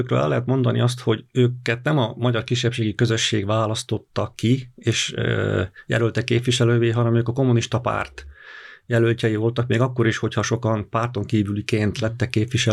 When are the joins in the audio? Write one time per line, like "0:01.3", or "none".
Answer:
none